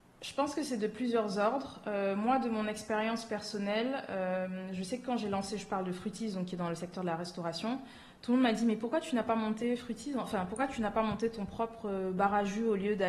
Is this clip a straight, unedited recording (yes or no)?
yes